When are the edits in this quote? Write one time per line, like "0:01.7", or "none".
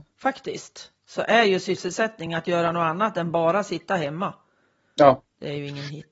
none